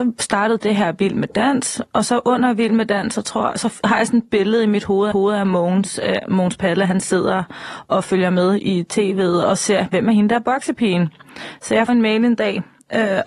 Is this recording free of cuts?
no; 2 cuts; at 5.1 s, 11.9 s

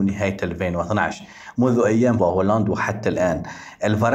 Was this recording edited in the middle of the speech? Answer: yes; 1 cut; at 2.2 s

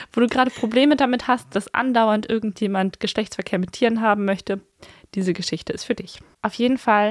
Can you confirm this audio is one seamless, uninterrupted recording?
yes; 0 cuts

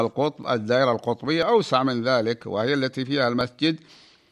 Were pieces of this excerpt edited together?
no; 0 cuts

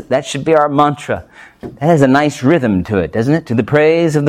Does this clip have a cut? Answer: no; 0 cuts

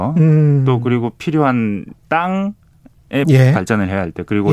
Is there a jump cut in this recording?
yes; 1 cut; at 3.2 s

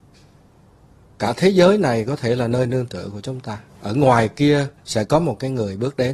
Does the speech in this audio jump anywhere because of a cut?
yes; 1 cut; at 4.8 s

